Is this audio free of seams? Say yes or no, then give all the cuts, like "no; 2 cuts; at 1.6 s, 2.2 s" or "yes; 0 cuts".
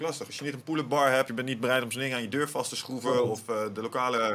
no; 1 cut; at 1.3 s